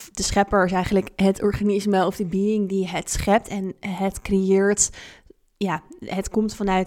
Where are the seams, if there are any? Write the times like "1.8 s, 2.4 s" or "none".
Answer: none